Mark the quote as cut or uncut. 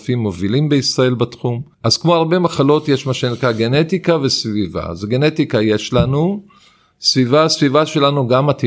uncut